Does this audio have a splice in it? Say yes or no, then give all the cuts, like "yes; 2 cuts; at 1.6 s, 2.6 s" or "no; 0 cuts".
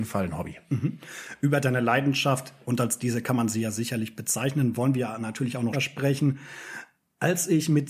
yes; 1 cut; at 5.7 s